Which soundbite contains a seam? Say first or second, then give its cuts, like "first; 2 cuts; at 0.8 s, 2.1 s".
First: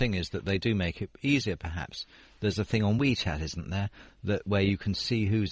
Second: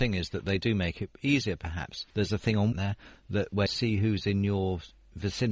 second; 3 cuts; at 2.1 s, 2.7 s, 3.7 s